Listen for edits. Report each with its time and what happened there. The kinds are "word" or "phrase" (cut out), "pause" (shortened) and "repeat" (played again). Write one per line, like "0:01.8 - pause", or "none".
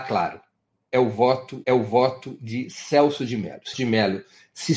0:01.6 - repeat
0:03.7 - word